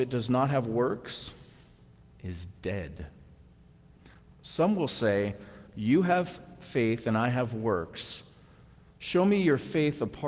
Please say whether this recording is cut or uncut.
uncut